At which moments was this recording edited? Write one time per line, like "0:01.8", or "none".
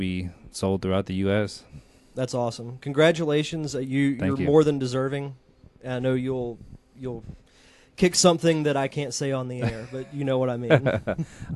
none